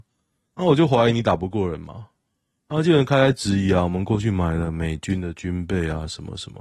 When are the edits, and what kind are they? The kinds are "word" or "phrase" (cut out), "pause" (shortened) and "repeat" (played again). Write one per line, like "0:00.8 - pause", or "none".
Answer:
none